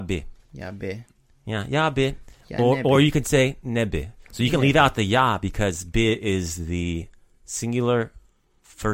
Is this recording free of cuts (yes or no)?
yes